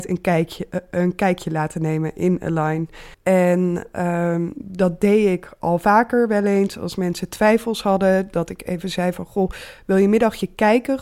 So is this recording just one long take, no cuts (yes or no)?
no